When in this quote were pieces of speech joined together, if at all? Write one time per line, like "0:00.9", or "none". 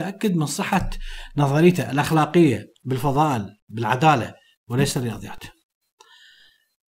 none